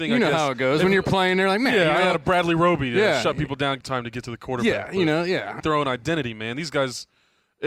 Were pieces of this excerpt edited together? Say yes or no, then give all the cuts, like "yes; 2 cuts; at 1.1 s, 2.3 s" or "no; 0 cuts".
yes; 2 cuts; at 3.8 s, 5.6 s